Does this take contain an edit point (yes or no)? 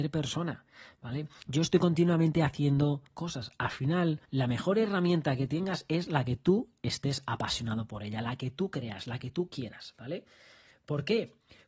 yes